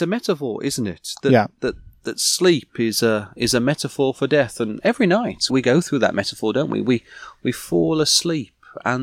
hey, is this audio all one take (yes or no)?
no